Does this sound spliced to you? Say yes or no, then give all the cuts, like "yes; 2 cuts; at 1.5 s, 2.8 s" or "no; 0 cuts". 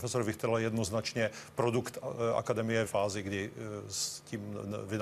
yes; 1 cut; at 2.9 s